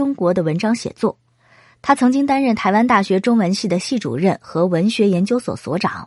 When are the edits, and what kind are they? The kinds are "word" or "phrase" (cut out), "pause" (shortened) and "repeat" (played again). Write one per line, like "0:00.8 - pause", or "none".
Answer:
none